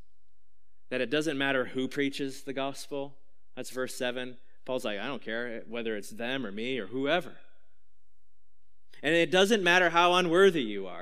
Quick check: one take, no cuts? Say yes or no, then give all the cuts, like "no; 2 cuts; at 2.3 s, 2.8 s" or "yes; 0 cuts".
yes; 0 cuts